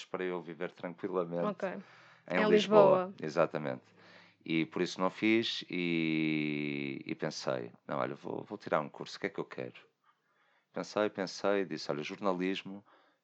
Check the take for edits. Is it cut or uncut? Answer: uncut